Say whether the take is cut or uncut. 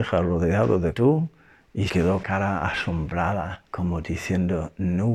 cut